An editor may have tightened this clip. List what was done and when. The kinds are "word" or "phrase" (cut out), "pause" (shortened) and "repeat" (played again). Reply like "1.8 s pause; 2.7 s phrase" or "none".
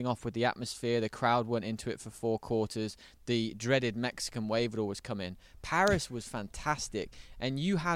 none